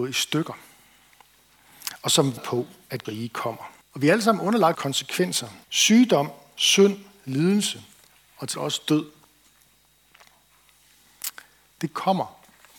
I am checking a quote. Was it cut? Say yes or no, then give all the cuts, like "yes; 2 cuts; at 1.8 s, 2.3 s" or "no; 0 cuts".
yes; 7 cuts; at 2.4 s, 3.0 s, 3.8 s, 4.7 s, 5.6 s, 8.0 s, 8.5 s